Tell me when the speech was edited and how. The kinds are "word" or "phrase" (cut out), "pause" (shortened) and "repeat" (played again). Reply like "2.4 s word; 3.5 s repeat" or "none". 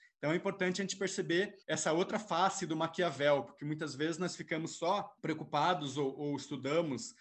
1.6 s pause; 5.2 s pause